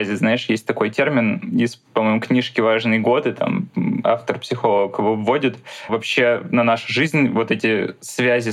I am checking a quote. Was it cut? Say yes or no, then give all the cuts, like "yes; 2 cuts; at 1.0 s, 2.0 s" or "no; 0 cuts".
yes; 1 cut; at 5.9 s